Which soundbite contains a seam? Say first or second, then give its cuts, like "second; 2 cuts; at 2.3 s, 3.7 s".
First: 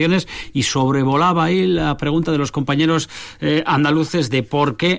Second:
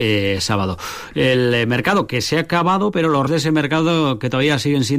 second; 1 cut; at 3.3 s